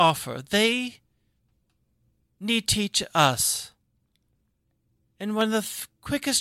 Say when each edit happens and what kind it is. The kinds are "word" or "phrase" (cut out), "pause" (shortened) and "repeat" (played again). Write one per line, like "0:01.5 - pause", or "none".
0:02.7 - word